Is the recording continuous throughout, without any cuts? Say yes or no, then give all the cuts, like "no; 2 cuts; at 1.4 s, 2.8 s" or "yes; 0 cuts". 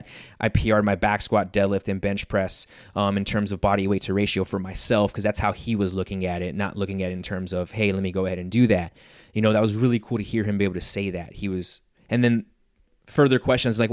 yes; 0 cuts